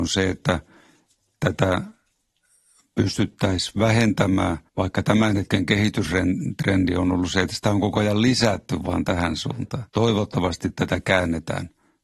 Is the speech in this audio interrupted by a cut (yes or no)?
yes